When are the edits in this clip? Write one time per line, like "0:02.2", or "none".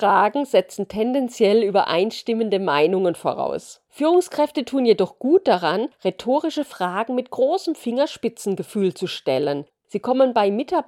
0:03.9